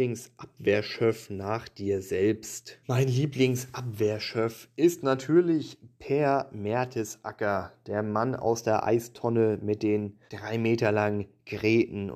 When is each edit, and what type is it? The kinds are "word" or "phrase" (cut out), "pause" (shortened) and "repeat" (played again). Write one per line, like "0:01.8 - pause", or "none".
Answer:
0:02.8 - pause
0:10.3 - pause